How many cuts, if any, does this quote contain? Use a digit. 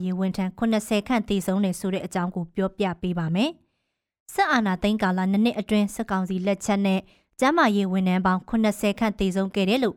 0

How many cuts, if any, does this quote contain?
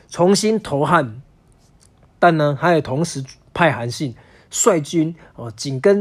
0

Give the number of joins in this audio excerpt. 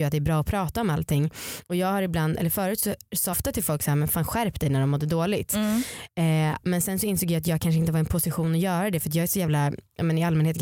1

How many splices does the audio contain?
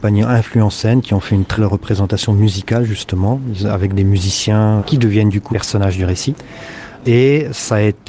3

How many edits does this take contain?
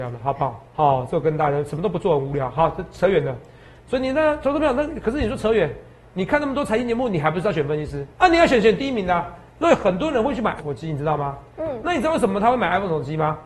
2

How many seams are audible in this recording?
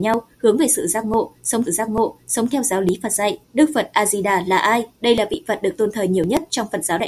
3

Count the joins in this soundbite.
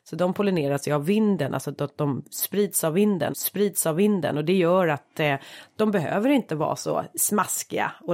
1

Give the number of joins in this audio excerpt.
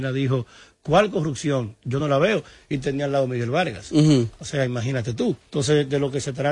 0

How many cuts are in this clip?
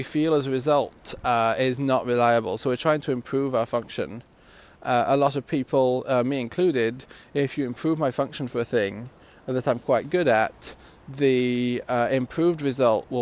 0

